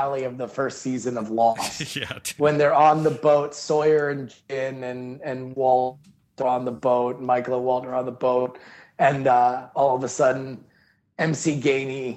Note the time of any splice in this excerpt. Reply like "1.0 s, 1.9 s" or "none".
none

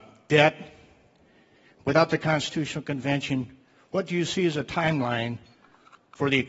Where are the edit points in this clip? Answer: none

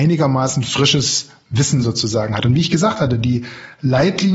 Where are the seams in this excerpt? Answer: none

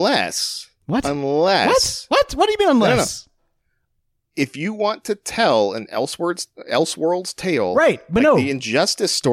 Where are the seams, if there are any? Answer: none

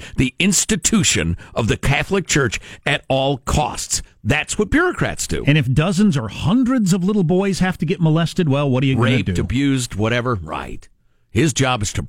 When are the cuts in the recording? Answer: none

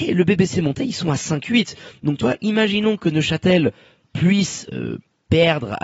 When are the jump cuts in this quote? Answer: none

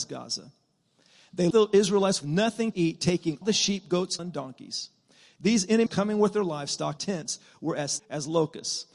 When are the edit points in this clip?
1.5 s, 2.2 s, 2.7 s, 3.4 s, 4.2 s, 5.9 s, 7.0 s, 8.0 s

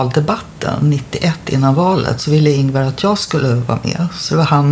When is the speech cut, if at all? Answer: none

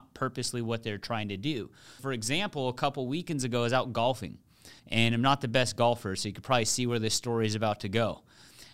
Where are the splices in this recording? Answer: 2.0 s, 4.8 s

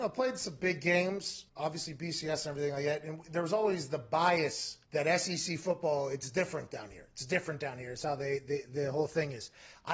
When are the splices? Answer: 1.5 s, 4.8 s

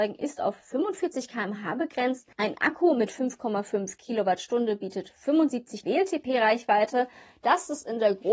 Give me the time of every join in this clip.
2.3 s, 5.8 s

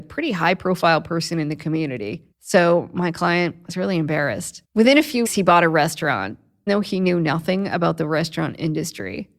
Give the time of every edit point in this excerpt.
2.3 s, 4.6 s, 5.2 s, 6.7 s

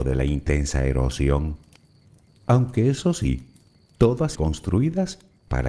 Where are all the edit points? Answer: 4.3 s

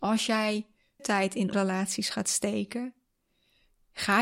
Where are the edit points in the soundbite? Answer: 1.0 s, 1.5 s

